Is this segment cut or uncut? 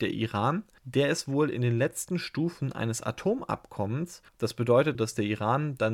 cut